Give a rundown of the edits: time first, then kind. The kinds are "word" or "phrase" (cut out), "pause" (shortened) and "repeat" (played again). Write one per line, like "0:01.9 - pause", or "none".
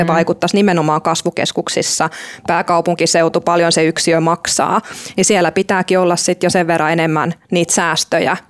none